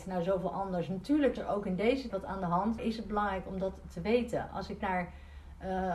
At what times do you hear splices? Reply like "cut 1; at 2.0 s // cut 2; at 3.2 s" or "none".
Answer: cut 1; at 1.4 s // cut 2; at 2.1 s // cut 3; at 2.8 s // cut 4; at 4.8 s